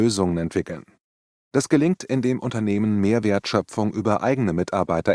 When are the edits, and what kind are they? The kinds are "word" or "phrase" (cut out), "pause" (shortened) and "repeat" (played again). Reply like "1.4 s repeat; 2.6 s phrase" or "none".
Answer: none